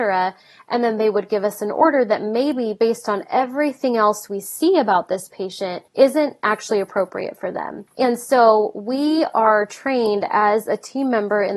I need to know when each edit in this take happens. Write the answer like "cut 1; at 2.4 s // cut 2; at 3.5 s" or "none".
cut 1; at 5.9 s // cut 2; at 7.9 s